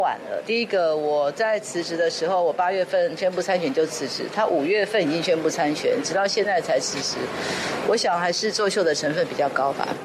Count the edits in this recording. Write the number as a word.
zero